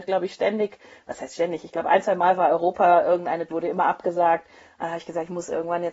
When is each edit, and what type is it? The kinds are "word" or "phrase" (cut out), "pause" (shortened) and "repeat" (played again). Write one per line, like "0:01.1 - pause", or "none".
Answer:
0:03.5 - phrase